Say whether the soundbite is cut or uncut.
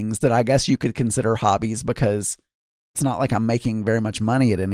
cut